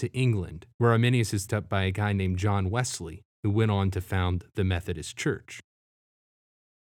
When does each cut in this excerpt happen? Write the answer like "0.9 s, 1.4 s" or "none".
1.5 s